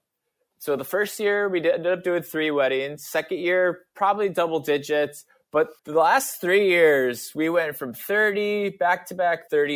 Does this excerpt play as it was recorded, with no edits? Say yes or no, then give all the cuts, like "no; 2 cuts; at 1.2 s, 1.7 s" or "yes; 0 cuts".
no; 1 cut; at 5.8 s